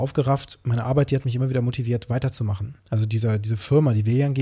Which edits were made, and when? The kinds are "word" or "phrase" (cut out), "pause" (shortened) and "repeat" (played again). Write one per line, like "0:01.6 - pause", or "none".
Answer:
0:02.8 - pause